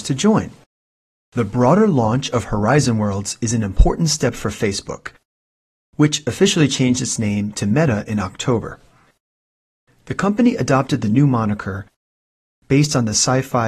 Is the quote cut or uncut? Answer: uncut